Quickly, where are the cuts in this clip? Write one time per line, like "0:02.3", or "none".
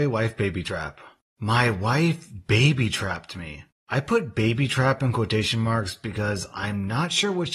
none